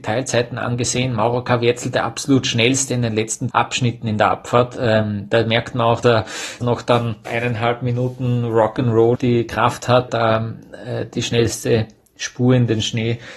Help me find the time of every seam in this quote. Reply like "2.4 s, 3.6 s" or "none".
3.5 s, 6.0 s, 6.6 s, 7.2 s, 9.1 s, 10.1 s